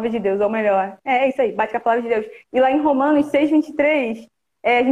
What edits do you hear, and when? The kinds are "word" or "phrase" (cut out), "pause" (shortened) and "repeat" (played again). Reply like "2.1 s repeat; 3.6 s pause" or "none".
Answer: 2.4 s pause